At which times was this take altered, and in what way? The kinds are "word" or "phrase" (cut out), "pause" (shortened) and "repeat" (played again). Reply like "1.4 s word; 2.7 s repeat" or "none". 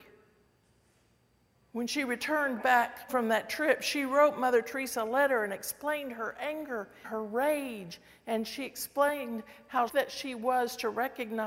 3.1 s word; 7.0 s word; 9.9 s word